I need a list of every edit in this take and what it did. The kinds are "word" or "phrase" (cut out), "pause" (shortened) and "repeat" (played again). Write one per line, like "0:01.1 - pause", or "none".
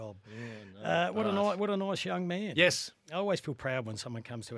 none